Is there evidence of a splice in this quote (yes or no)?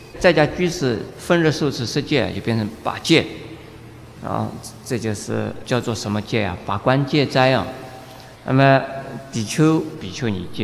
yes